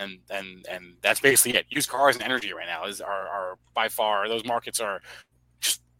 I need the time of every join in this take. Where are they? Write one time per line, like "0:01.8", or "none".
none